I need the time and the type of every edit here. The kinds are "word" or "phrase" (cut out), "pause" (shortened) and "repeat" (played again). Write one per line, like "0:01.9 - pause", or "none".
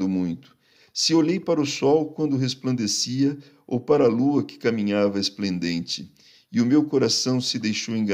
none